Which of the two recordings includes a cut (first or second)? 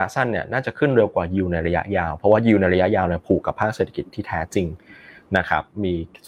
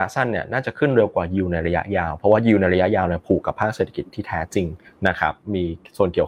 second